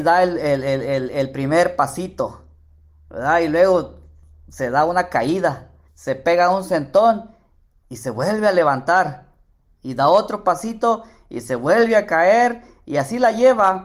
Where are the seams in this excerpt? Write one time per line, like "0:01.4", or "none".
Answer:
0:05.9